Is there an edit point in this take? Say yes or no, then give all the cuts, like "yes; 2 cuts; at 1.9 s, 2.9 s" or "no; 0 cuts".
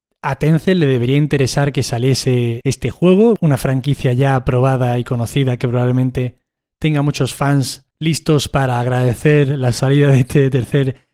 no; 0 cuts